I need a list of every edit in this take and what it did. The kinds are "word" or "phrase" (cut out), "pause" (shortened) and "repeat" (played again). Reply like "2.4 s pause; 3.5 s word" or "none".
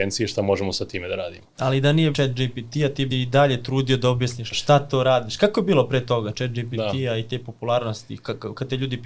2.1 s word; 3.1 s word; 4.5 s word